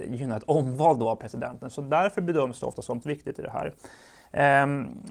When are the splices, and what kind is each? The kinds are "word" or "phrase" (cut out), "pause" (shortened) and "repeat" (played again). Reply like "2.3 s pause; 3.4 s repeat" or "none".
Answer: 3.0 s word